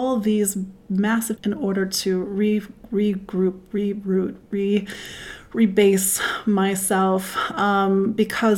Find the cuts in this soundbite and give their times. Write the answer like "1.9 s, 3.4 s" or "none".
1.4 s